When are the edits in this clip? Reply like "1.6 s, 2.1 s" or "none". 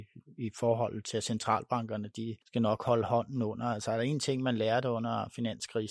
2.4 s